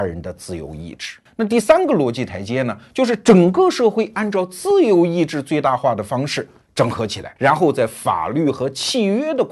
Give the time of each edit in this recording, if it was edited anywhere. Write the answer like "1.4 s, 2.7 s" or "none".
1.3 s, 7.4 s